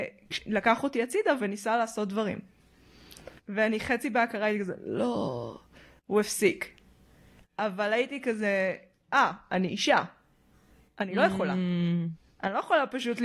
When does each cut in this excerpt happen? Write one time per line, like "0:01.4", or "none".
0:03.4